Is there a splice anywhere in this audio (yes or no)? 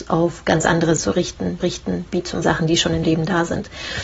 yes